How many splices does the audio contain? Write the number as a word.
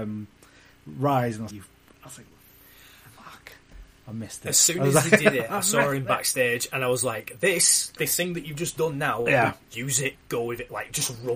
two